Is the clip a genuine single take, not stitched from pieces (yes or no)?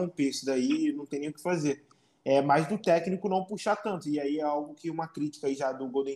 yes